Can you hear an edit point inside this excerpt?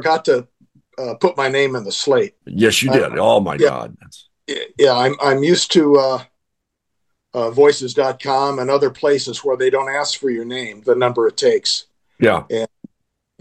yes; 2 cuts; at 2.4 s, 10.8 s

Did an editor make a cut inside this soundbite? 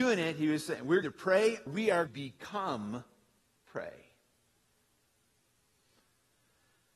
yes; 4 cuts; at 1.0 s, 1.7 s, 2.1 s, 3.4 s

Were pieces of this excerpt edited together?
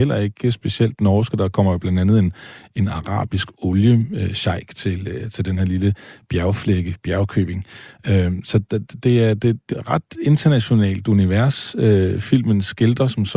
yes; 1 cut; at 9.7 s

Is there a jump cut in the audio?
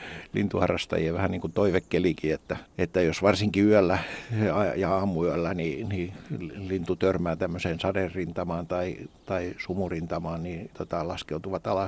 yes; 1 cut; at 10.7 s

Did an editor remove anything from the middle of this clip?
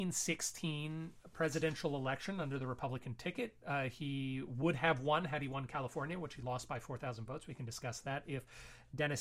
no; 0 cuts

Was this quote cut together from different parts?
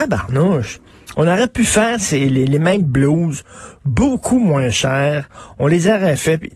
no; 0 cuts

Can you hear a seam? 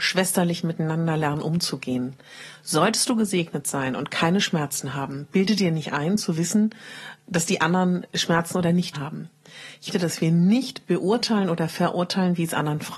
yes; 2 cuts; at 8.9 s, 9.9 s

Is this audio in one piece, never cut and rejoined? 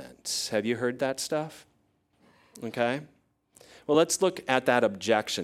yes; 0 cuts

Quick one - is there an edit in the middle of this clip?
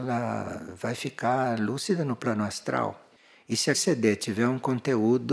yes; 1 cut; at 3.7 s

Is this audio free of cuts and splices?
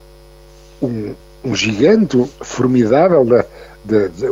no; 2 cuts; at 1.2 s, 2.3 s

